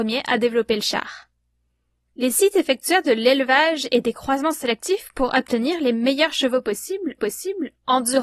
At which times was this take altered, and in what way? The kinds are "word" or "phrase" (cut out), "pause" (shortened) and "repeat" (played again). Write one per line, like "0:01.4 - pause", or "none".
0:07.2 - repeat